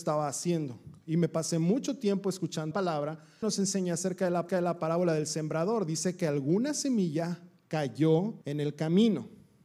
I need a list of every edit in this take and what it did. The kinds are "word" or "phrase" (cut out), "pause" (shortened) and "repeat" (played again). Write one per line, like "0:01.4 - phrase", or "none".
0:02.7 - word
0:03.4 - phrase
0:04.5 - repeat
0:08.4 - pause